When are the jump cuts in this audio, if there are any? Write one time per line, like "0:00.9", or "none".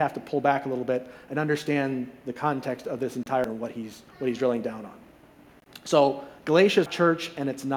0:03.4
0:04.1
0:06.9